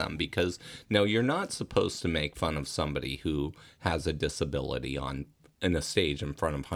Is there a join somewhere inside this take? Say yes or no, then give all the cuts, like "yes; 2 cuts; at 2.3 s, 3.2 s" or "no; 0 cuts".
no; 0 cuts